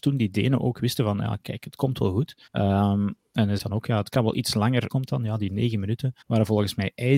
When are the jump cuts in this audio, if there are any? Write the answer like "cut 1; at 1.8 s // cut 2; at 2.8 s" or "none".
cut 1; at 2.5 s // cut 2; at 3.6 s // cut 3; at 4.9 s // cut 4; at 6.2 s

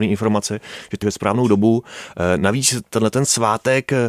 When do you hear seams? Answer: cut 1; at 1.0 s

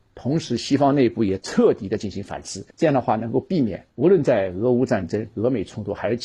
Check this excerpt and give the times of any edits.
cut 1; at 2.7 s // cut 2; at 3.9 s

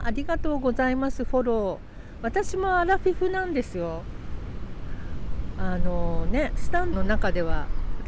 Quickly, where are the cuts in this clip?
cut 1; at 6.9 s

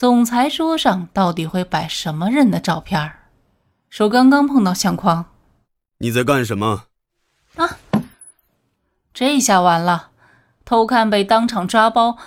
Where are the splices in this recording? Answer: none

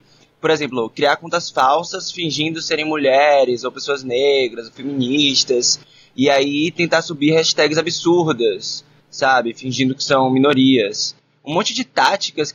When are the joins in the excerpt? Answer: none

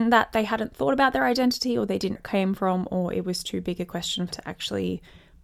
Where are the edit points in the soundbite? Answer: cut 1; at 2.2 s // cut 2; at 4.3 s

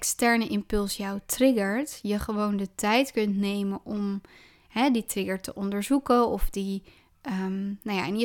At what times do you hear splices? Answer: none

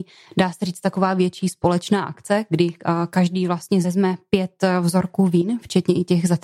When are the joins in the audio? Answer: cut 1; at 3.8 s

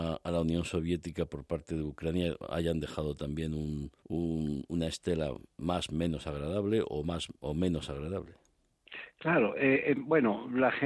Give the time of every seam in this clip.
cut 1; at 4.0 s

